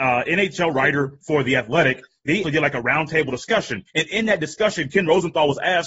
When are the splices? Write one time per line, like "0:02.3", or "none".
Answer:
0:02.4
0:03.9